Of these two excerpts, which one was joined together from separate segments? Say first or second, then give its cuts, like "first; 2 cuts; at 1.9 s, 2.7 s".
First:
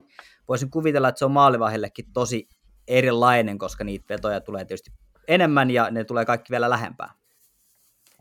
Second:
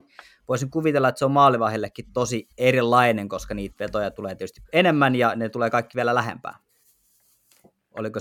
second; 2 cuts; at 2.5 s, 4.6 s